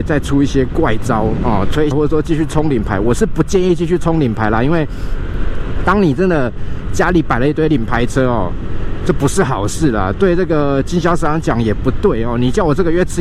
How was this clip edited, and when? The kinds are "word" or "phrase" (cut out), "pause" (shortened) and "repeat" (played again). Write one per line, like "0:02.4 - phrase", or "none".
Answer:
0:01.9 - phrase

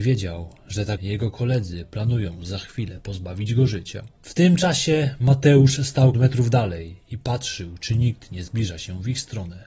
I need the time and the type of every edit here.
0:01.0 - word
0:06.1 - word

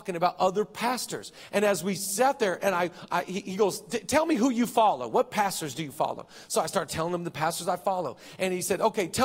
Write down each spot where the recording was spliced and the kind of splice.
none

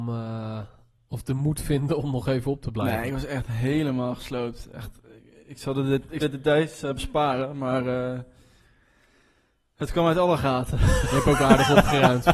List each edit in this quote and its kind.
0:06.2 - word

